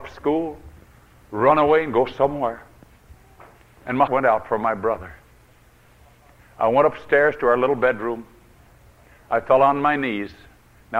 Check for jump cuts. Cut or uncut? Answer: cut